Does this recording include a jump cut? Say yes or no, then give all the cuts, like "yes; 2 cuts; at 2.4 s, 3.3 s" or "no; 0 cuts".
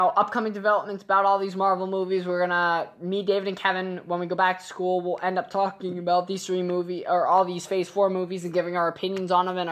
no; 0 cuts